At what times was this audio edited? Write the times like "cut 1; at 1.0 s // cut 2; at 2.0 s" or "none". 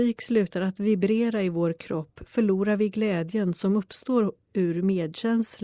none